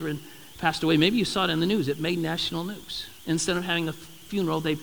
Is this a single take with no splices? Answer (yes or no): no